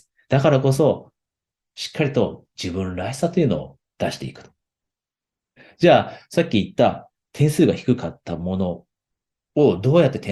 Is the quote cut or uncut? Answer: uncut